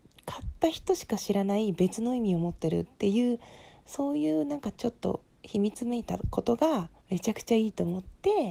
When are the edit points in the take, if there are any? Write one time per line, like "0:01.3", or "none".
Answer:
0:02.9
0:07.0